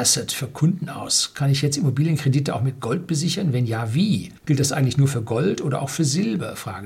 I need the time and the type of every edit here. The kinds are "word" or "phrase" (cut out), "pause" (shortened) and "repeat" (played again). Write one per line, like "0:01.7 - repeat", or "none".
0:04.4 - pause

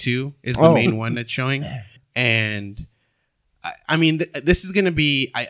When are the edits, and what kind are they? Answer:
0:02.0 - pause

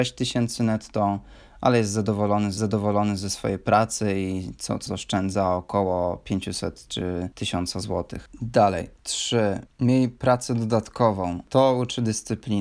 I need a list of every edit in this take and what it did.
0:02.6 - repeat
0:04.9 - word

